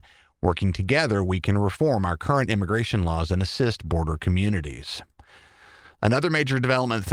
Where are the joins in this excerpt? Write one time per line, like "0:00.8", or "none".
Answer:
none